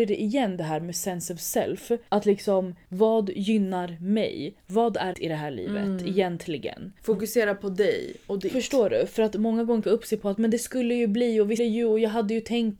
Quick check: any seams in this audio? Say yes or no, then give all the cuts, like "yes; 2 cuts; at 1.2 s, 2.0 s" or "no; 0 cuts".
yes; 4 cuts; at 2.1 s, 5.1 s, 9.8 s, 11.6 s